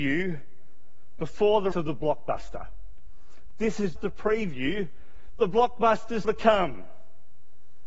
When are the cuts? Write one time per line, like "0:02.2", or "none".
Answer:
0:01.7
0:04.0
0:06.2